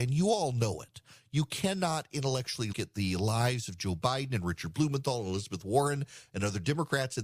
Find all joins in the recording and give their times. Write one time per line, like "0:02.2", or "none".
0:02.7